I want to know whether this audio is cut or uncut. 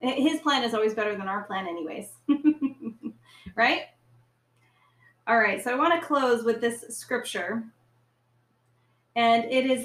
uncut